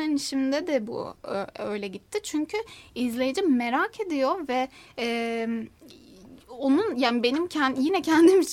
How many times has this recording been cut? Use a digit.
0